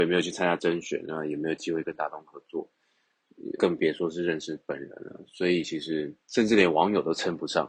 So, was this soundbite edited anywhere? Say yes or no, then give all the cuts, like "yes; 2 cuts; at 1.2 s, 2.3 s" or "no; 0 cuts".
yes; 2 cuts; at 3.6 s, 6.2 s